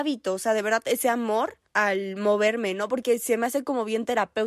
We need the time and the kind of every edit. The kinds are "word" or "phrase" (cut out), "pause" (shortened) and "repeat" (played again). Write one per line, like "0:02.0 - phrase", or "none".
0:01.6 - pause